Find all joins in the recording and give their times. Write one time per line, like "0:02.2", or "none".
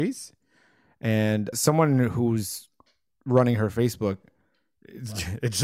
0:01.5

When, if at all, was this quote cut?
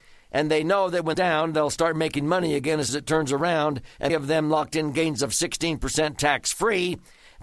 0:01.1
0:02.9
0:04.1

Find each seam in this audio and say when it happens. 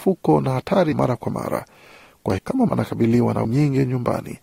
0:00.9
0:02.4
0:02.7
0:03.4

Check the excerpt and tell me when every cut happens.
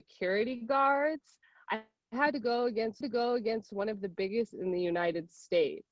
0:03.0
0:04.5

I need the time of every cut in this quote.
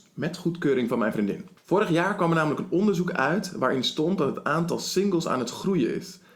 0:01.6

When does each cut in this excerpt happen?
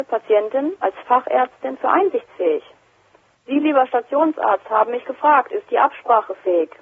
none

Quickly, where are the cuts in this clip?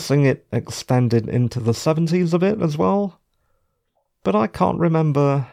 none

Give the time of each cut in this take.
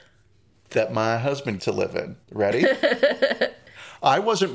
0:01.6
0:02.2

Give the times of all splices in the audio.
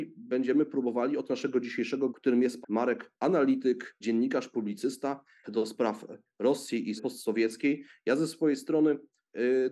0:01.3
0:02.1
0:02.6
0:03.1
0:04.0
0:05.4
0:07.0

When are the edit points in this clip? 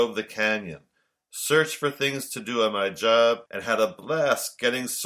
0:03.5

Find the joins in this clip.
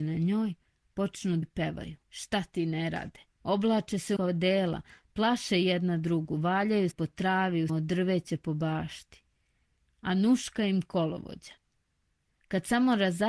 0:01.4
0:02.0
0:03.3
0:04.2
0:06.9
0:07.7

